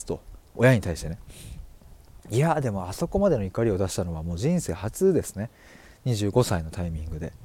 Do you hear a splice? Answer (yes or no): no